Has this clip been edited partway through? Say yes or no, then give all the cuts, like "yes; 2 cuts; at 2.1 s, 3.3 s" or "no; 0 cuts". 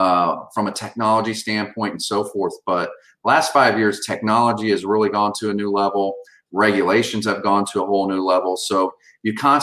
no; 0 cuts